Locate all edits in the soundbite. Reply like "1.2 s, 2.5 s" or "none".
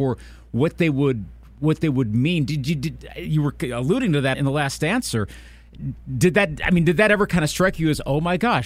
4.3 s